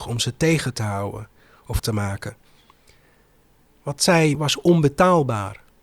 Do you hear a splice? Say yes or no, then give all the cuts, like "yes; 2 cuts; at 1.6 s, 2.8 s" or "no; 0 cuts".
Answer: yes; 2 cuts; at 1.8 s, 4.3 s